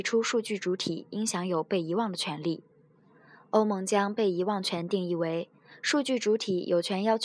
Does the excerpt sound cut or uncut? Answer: uncut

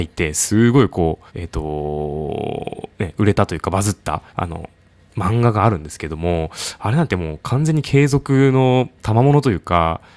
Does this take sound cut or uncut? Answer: cut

